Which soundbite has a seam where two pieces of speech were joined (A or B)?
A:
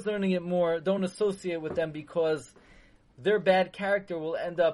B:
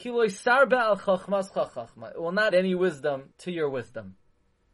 B